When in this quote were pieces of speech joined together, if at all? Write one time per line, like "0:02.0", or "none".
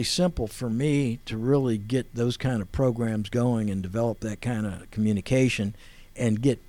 none